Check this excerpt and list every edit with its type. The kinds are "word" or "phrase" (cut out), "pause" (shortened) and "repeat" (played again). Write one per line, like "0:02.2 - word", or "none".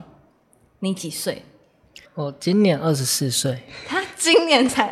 0:02.0 - pause